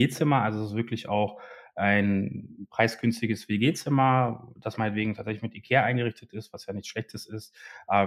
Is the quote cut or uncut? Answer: uncut